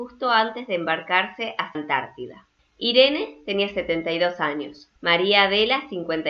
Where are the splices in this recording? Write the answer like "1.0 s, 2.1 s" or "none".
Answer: 1.7 s, 2.6 s, 5.0 s